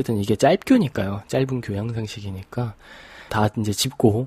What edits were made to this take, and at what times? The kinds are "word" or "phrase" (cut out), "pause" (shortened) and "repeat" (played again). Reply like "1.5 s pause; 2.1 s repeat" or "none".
3.3 s word